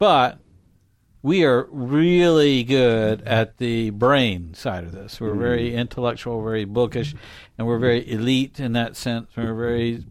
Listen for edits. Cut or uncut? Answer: uncut